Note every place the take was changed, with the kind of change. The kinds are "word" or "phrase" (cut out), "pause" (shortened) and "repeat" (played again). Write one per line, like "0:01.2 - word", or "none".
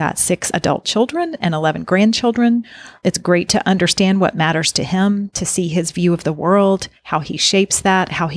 none

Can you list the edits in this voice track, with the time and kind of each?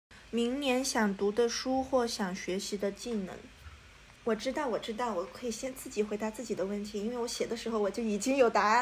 0:04.2 - pause

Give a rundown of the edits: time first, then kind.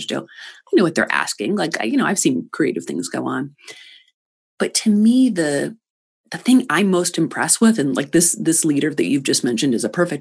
none

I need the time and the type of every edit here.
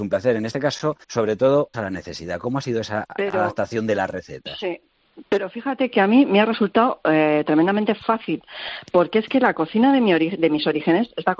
0:01.0 - pause
0:01.7 - word

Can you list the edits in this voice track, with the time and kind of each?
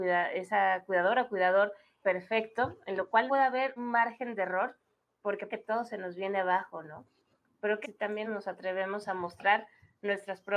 0:02.0 - word
0:03.3 - word
0:03.8 - word
0:05.5 - word
0:07.8 - word
0:08.2 - word

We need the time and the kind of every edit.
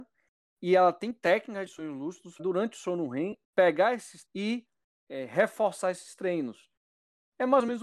0:02.4 - word
0:03.4 - pause
0:04.2 - word
0:05.1 - word

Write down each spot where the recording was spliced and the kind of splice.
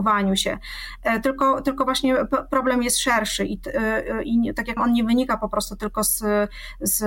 0:04.8 - word

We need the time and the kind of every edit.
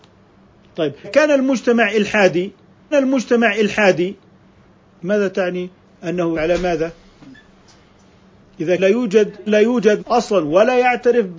0:01.0 - word
0:02.9 - repeat
0:06.3 - word
0:08.8 - word
0:09.5 - phrase
0:10.0 - word

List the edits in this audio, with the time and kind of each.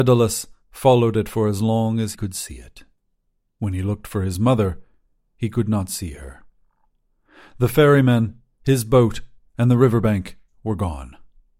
0:02.1 - word

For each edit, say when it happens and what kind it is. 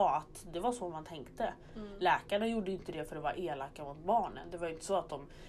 none

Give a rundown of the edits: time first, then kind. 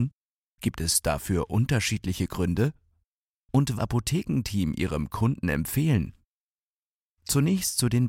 0:03.8 - phrase

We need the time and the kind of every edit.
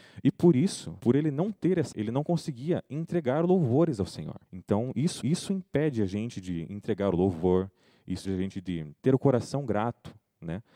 0:01.0 - word
0:01.9 - word
0:04.5 - pause
0:05.2 - repeat
0:08.2 - word
0:09.0 - pause

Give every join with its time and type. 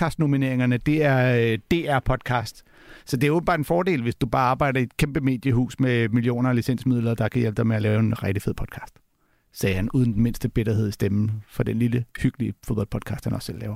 none

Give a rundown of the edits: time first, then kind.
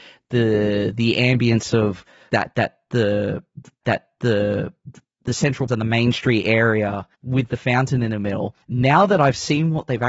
0:02.3 - word
0:03.8 - repeat
0:05.7 - word
0:07.1 - pause
0:08.6 - pause

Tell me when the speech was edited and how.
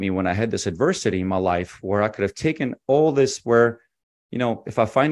none

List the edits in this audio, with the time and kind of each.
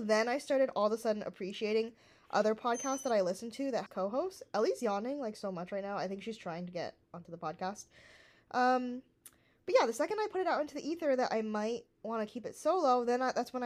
0:03.9 - word

